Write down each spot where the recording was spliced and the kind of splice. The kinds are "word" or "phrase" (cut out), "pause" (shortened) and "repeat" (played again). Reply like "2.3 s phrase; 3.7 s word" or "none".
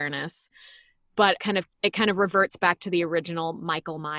1.4 s word; 1.7 s word